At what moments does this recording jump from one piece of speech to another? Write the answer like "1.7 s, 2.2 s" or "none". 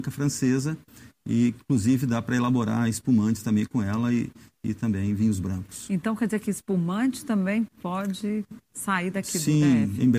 none